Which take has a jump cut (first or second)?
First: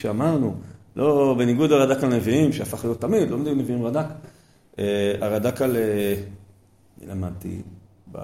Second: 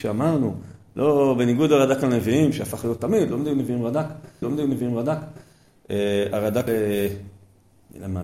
second